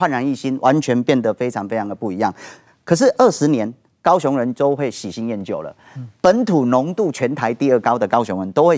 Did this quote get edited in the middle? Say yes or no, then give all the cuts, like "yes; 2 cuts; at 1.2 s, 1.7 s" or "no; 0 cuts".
no; 0 cuts